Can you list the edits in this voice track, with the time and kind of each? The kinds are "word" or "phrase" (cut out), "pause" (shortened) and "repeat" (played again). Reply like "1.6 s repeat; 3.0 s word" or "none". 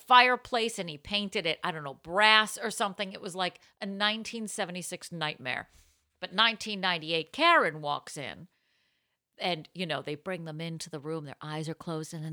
none

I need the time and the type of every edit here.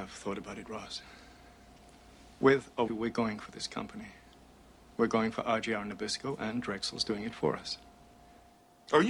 2.9 s word

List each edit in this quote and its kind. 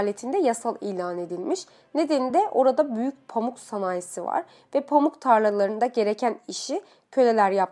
none

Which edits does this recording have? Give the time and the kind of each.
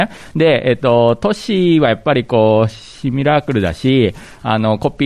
none

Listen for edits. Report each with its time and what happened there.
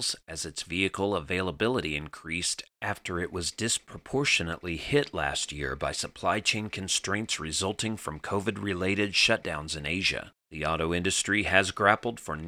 none

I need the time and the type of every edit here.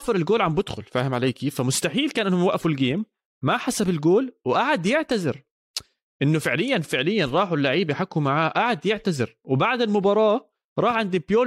none

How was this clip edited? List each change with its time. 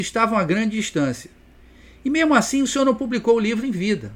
none

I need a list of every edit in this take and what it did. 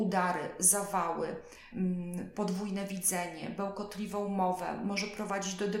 none

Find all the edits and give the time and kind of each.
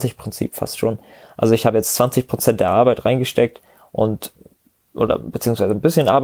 none

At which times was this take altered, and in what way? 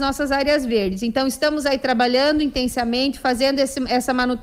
none

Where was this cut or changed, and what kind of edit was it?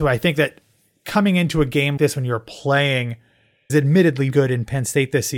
2.0 s word; 3.7 s phrase; 4.3 s word

